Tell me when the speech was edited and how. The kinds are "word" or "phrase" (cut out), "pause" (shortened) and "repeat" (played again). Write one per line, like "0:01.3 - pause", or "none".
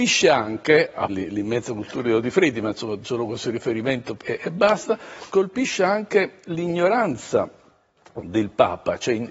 0:01.1 - word
0:03.0 - word
0:04.2 - word
0:05.3 - word